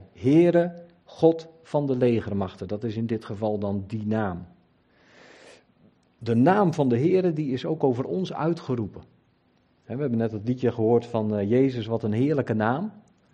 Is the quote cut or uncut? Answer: uncut